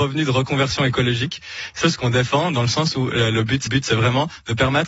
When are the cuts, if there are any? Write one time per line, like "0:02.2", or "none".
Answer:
0:01.8
0:03.7